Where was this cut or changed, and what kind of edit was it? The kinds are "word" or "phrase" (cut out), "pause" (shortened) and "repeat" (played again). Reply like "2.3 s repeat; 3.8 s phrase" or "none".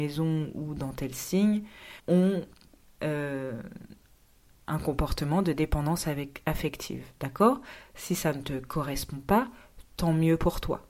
2.0 s pause